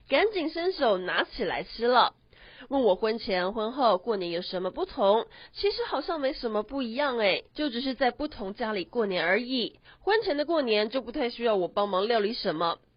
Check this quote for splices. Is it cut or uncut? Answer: cut